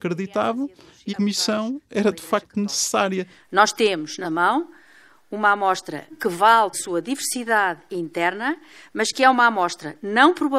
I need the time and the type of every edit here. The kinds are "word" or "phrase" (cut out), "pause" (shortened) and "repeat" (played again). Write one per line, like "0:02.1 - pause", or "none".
0:01.1 - word
0:04.2 - word
0:06.1 - word
0:06.7 - word